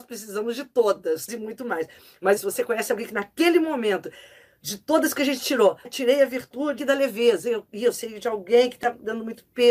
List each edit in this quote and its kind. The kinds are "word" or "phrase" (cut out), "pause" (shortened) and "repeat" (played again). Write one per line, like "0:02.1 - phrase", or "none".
0:01.3 - word
0:02.4 - word
0:05.8 - word
0:06.8 - word